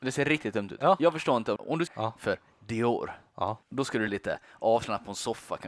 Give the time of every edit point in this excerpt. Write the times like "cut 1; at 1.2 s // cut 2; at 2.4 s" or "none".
cut 1; at 1.6 s // cut 2; at 1.9 s // cut 3; at 3.6 s // cut 4; at 4.1 s